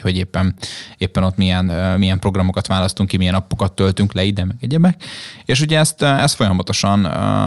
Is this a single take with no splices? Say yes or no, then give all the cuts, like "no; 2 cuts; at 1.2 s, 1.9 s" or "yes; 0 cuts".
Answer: yes; 0 cuts